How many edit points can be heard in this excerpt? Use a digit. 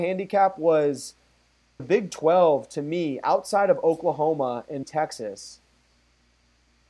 2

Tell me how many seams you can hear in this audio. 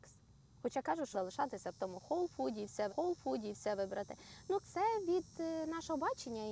3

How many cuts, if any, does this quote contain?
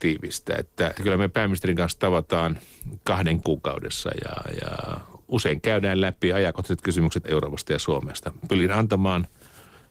4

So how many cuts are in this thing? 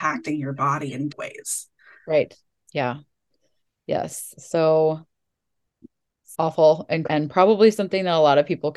3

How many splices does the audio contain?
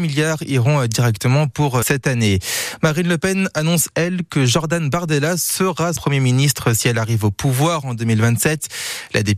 2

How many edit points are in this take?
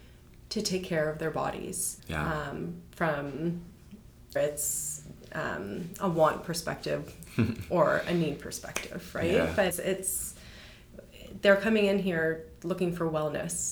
3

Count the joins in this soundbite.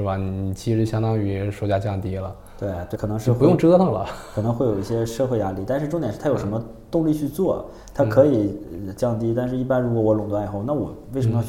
1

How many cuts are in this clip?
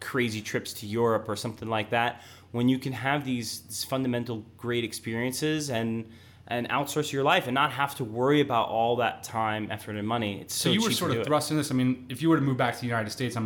0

